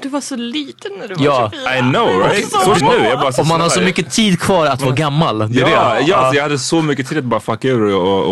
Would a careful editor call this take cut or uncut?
cut